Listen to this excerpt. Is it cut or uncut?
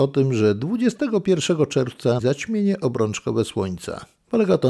cut